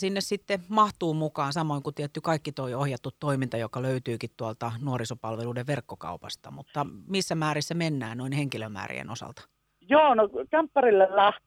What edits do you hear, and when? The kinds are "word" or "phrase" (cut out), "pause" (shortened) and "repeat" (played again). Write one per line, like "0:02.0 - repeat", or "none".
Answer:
none

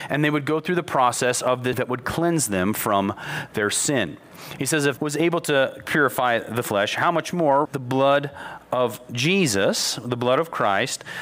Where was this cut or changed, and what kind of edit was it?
0:01.7 - word
0:05.0 - word
0:07.6 - word

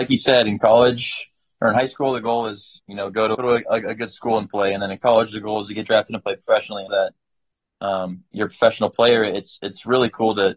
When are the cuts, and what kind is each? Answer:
0:03.3 - word
0:06.9 - word

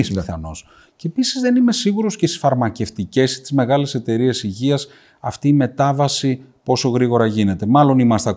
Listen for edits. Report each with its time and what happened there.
none

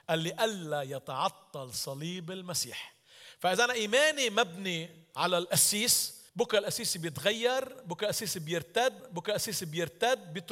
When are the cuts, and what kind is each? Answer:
0:06.3 - pause
0:09.0 - repeat

